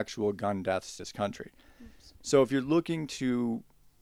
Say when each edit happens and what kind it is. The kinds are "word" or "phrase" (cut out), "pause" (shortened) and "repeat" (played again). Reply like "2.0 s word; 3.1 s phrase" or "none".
1.0 s word